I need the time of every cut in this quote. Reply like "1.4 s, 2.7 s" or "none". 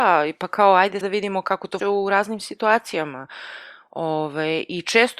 1.0 s, 1.8 s